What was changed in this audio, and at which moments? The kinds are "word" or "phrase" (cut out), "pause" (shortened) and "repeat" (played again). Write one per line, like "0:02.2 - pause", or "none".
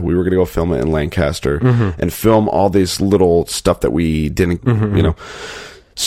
0:04.6 - phrase